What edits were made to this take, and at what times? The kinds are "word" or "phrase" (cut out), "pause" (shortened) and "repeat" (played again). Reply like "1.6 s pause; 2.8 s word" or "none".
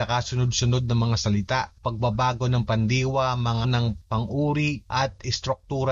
3.6 s word; 4.0 s word